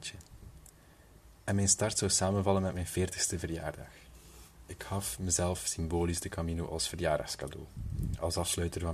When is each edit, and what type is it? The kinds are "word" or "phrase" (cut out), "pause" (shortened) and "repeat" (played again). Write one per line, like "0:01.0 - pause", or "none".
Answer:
0:01.3 - pause